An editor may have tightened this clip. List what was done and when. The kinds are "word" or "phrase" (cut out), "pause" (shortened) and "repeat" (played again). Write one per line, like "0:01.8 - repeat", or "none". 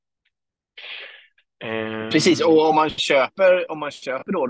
none